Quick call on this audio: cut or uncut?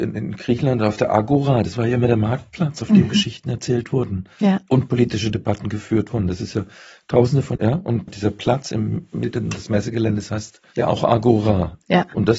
cut